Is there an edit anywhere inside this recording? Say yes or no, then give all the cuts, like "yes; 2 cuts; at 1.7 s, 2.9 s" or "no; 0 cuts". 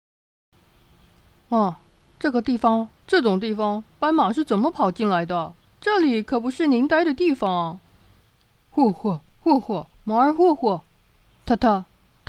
yes; 5 cuts; at 3.0 s, 5.6 s, 8.2 s, 9.3 s, 9.9 s